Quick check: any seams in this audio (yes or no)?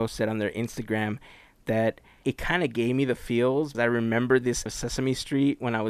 yes